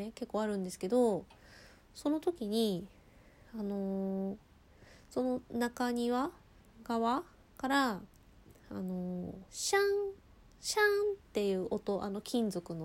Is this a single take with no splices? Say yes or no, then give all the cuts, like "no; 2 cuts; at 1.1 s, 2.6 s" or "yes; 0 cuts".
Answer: no; 2 cuts; at 7.4 s, 9.5 s